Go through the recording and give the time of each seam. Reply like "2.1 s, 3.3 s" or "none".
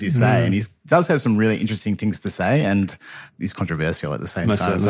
3.5 s